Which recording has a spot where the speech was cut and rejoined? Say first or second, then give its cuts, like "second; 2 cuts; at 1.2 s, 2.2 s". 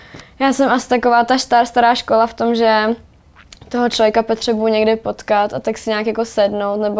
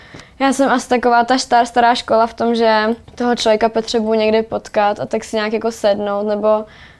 second; 1 cut; at 3.0 s